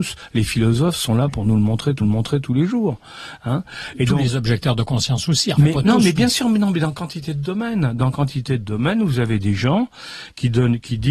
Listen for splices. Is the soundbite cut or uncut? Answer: cut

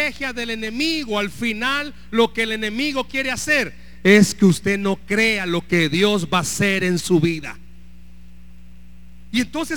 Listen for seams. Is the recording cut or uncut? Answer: uncut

